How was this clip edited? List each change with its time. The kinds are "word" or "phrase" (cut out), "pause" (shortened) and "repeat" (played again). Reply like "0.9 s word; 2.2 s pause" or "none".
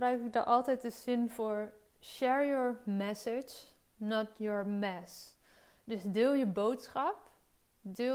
none